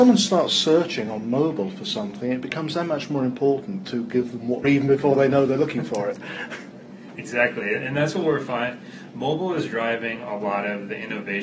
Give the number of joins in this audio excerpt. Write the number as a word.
one